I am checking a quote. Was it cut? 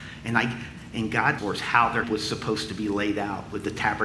yes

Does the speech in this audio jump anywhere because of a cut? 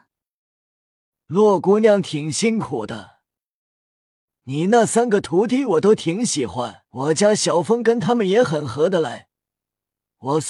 yes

